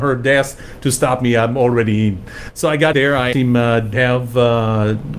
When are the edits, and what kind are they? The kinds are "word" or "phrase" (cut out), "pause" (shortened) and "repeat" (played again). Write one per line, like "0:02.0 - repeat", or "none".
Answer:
0:02.9 - word
0:03.3 - word
0:03.9 - word